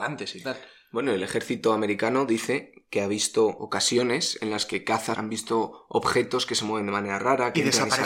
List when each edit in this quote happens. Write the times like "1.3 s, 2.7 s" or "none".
5.1 s